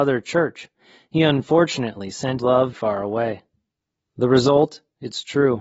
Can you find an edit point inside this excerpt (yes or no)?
yes